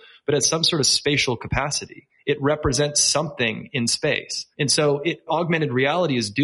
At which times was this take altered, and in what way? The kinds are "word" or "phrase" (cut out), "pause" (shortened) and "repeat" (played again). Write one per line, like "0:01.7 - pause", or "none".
0:04.5 - pause
0:05.3 - word